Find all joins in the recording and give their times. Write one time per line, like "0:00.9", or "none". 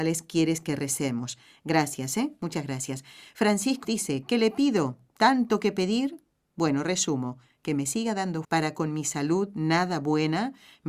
0:03.8
0:08.4